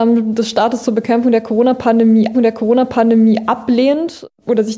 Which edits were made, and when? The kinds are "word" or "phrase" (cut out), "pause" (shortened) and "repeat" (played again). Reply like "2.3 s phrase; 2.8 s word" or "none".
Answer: 2.3 s repeat